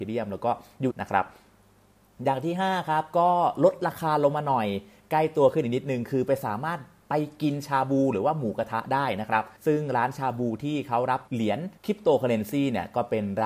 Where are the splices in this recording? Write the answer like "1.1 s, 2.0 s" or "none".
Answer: 0.9 s, 9.6 s, 11.3 s, 11.8 s